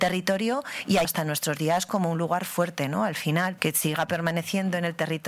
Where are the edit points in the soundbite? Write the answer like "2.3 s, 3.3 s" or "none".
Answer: 1.0 s, 3.6 s

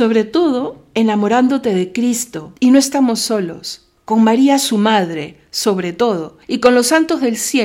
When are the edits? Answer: 2.6 s, 4.0 s, 6.4 s

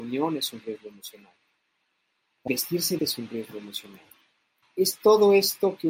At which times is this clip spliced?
2.5 s, 3.0 s, 4.6 s

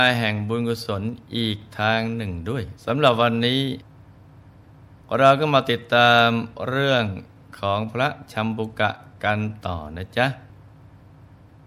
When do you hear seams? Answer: 2.8 s

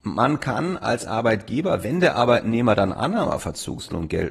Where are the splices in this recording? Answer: none

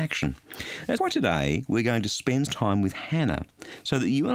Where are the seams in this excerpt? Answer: 1.0 s, 2.5 s

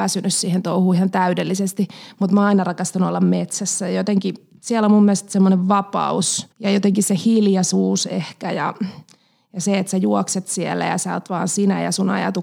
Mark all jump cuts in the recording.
6.5 s

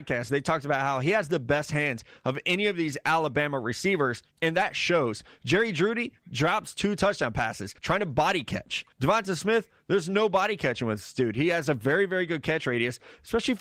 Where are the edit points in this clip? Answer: 4.3 s, 7.8 s, 8.9 s

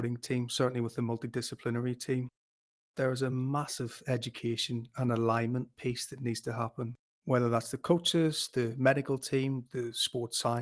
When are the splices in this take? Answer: none

